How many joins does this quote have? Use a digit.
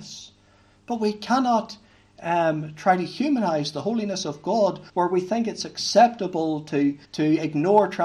2